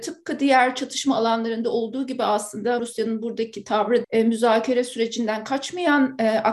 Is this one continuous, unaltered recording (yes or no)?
no